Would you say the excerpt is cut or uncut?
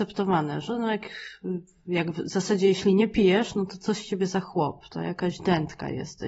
uncut